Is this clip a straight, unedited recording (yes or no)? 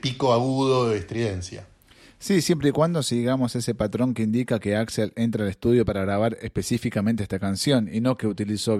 yes